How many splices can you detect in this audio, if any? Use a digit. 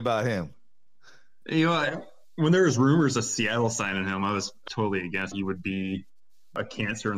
2